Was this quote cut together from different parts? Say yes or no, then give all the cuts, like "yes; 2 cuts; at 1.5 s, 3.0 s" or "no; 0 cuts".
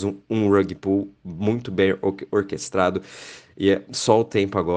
no; 0 cuts